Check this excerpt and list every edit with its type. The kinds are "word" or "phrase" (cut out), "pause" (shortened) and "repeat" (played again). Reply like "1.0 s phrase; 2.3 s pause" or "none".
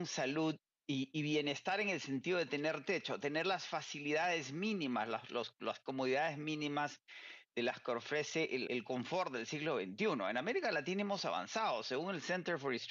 8.7 s word